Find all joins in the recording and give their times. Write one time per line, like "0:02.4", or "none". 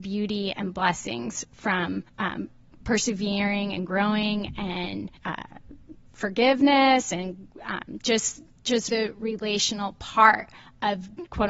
0:02.1
0:05.2
0:08.9